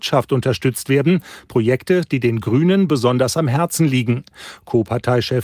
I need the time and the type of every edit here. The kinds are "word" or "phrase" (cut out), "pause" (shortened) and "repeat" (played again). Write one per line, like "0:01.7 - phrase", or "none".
none